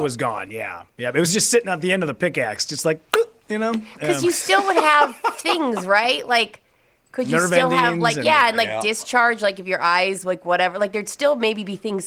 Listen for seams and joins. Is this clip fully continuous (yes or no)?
yes